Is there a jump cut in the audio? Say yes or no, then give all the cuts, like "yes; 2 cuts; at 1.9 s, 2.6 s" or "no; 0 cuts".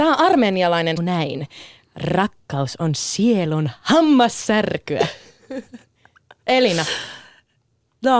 yes; 1 cut; at 1.0 s